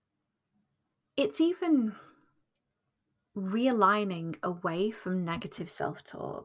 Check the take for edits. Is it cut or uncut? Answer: uncut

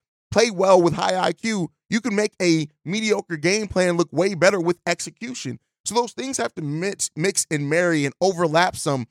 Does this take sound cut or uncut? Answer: uncut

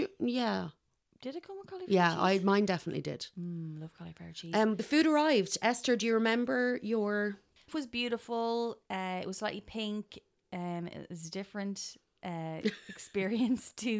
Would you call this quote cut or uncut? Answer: cut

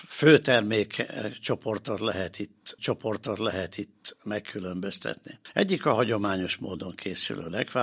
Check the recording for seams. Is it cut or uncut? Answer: cut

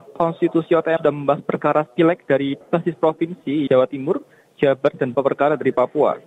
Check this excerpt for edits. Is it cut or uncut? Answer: cut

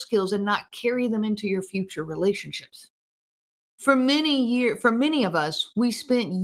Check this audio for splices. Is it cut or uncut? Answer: uncut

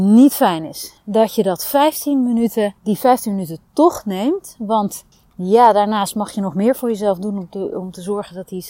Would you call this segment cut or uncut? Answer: cut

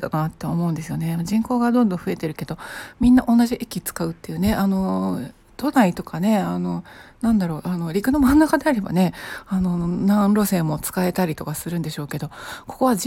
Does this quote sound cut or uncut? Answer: cut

